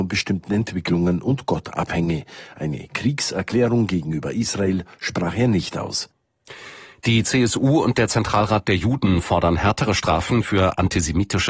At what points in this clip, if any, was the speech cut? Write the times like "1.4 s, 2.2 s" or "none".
none